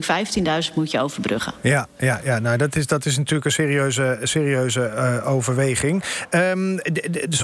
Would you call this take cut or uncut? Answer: uncut